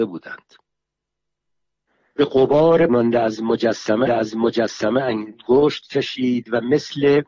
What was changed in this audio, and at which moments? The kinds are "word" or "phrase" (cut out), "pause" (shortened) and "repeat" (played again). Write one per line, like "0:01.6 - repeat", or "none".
0:02.9 - word
0:04.1 - repeat